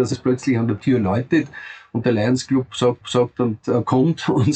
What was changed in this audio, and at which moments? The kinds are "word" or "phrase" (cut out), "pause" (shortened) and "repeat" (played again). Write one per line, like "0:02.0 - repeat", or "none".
0:03.0 - repeat